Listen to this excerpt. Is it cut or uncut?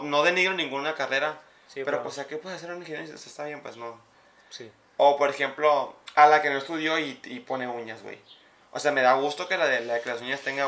uncut